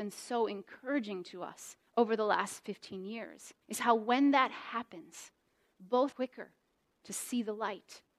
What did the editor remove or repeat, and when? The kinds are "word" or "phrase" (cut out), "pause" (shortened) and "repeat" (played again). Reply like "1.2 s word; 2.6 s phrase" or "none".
1.9 s pause; 3.6 s pause; 6.1 s phrase